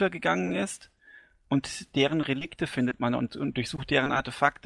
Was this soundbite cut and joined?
no; 0 cuts

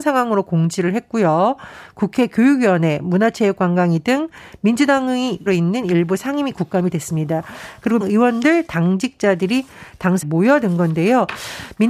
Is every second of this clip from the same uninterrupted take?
no; 4 cuts; at 5.5 s, 6.9 s, 8.0 s, 10.2 s

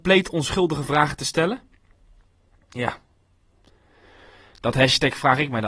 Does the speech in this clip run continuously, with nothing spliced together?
yes; 0 cuts

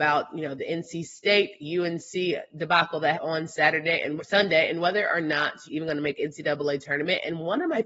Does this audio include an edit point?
yes; 3 cuts; at 3.1 s, 4.2 s, 5.7 s

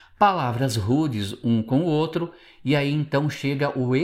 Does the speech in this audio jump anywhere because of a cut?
no; 0 cuts

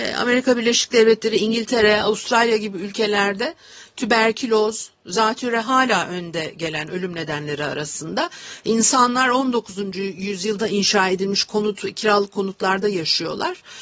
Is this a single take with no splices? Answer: yes; 0 cuts

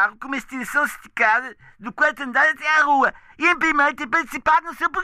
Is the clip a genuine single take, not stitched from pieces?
yes; 0 cuts

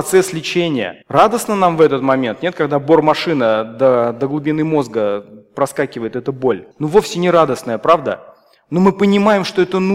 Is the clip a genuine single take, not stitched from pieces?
no; 2 cuts; at 1.0 s, 6.7 s

